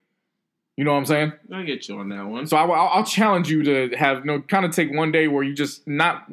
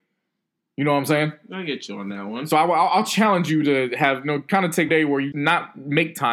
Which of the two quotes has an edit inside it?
second; 2 cuts; at 4.9 s, 5.3 s

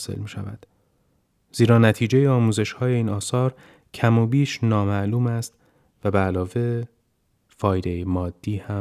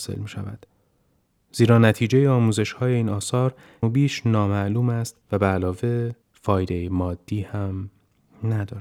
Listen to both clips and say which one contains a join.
second; 3 cuts; at 3.8 s, 5.2 s, 6.2 s

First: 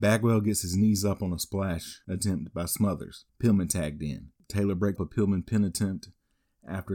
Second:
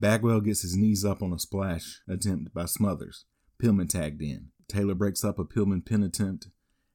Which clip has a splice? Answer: first; 2 cuts; at 3.3 s, 5.0 s

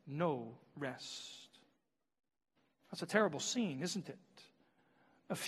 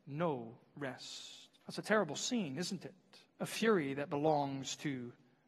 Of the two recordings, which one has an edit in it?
second; 2 cuts; at 1.6 s, 3.3 s

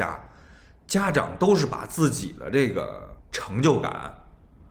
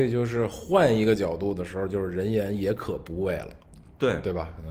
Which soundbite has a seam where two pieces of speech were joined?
first; 1 cut; at 3.2 s

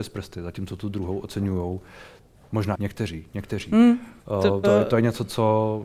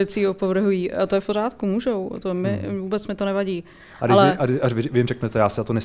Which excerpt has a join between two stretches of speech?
first; 3 cuts; at 2.7 s, 4.2 s, 4.6 s

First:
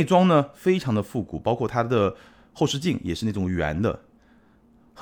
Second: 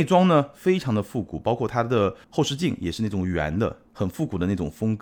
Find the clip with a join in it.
second; 2 cuts; at 2.2 s, 3.9 s

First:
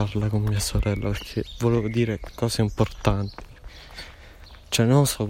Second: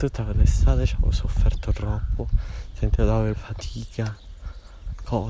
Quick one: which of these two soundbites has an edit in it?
second; 1 cut; at 3.3 s

